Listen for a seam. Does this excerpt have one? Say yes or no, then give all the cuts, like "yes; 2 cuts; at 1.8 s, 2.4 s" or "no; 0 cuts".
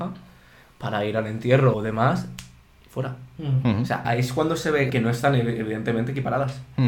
yes; 3 cuts; at 1.7 s, 4.0 s, 4.9 s